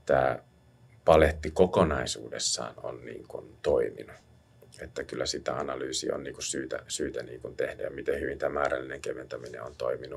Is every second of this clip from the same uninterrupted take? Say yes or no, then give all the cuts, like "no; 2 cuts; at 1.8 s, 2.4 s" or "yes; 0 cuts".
yes; 0 cuts